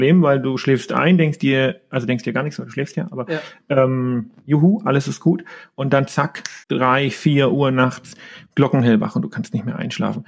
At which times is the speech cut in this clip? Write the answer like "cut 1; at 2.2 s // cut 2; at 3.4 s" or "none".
cut 1; at 6.6 s